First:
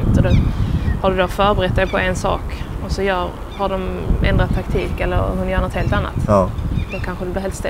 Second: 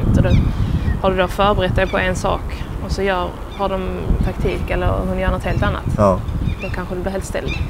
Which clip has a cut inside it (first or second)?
second